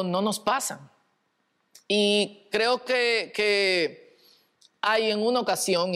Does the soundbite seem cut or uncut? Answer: uncut